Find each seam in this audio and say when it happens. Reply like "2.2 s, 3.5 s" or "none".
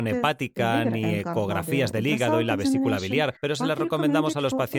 3.4 s